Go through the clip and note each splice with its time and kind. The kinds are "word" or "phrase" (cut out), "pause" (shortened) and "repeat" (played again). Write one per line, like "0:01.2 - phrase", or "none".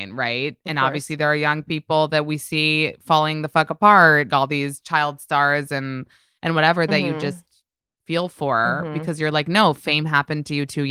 0:04.3 - word